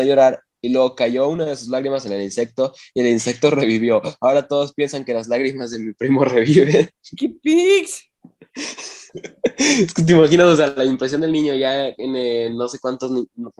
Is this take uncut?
no; 1 cut; at 9.1 s

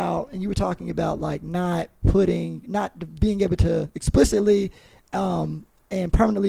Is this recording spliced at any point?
no; 0 cuts

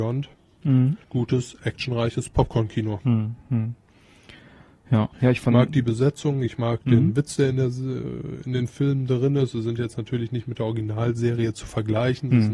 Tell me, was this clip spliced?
yes; 2 cuts; at 1.0 s, 5.1 s

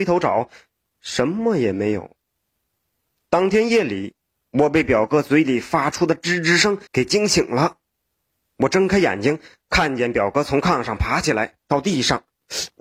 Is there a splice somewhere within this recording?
yes; 1 cut; at 6.9 s

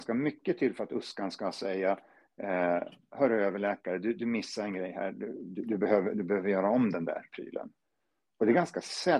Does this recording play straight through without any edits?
yes; 0 cuts

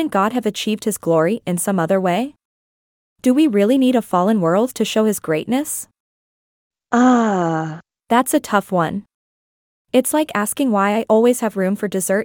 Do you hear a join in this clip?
no; 0 cuts

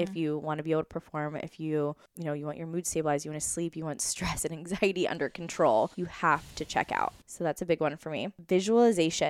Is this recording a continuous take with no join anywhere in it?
no; 1 cut; at 5.9 s

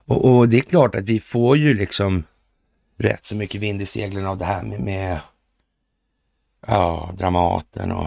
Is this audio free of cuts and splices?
yes; 0 cuts

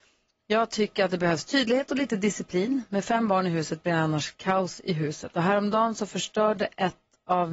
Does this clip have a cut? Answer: no; 0 cuts

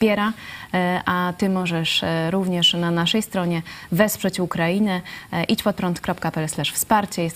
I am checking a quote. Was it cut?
no; 0 cuts

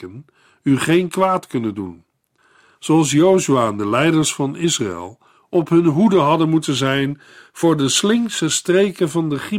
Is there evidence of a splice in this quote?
no; 0 cuts

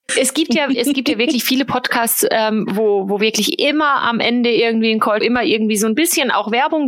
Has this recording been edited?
yes; 1 cut; at 5.2 s

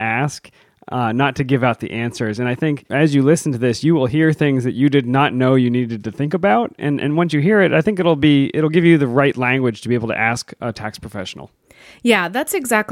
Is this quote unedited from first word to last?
yes; 0 cuts

